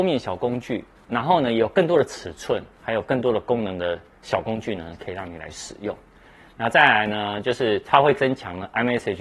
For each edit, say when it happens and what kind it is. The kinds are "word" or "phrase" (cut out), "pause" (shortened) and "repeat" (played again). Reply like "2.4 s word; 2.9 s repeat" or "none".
none